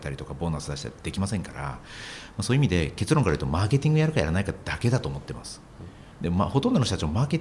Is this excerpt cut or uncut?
cut